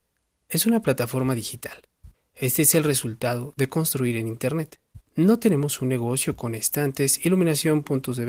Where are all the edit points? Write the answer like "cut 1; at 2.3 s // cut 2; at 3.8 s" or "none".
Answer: cut 1; at 2.1 s // cut 2; at 5.1 s